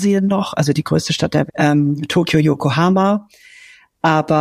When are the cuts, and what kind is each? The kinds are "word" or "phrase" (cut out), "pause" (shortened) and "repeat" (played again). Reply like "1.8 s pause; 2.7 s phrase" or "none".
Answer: 1.5 s word